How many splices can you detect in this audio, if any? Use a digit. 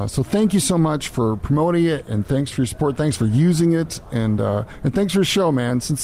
0